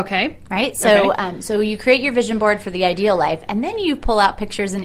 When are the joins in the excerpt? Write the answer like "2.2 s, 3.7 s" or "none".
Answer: none